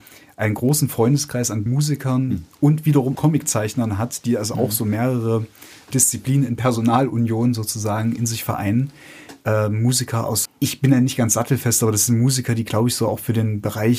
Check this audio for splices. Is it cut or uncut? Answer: cut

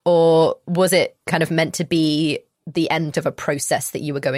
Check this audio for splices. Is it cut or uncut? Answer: cut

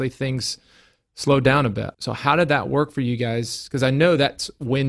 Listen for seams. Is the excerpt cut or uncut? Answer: cut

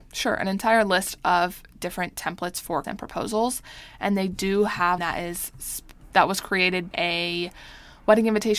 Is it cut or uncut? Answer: cut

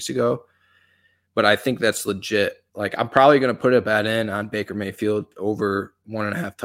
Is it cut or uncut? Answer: cut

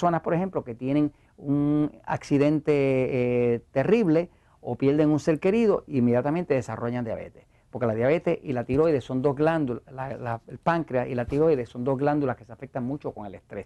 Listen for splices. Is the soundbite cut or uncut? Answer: uncut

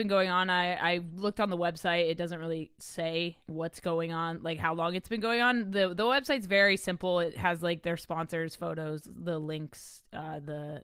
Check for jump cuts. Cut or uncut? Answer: cut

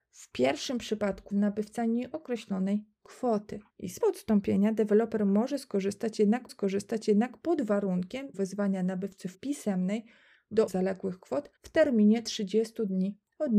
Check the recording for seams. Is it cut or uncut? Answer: cut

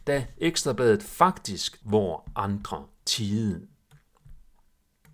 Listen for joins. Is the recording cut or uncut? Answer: cut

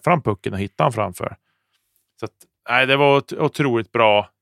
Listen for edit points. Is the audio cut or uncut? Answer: uncut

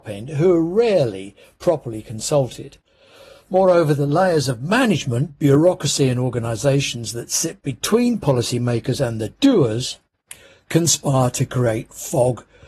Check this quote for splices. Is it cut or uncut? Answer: uncut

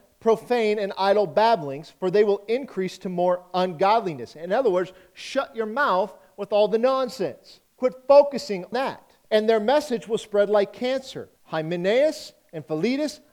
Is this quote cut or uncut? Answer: cut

